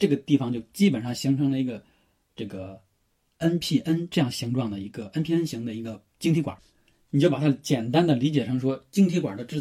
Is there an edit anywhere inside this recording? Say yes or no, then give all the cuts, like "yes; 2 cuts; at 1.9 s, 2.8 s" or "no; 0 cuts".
no; 0 cuts